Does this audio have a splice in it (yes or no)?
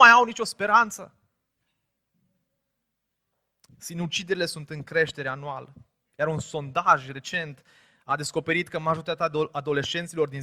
no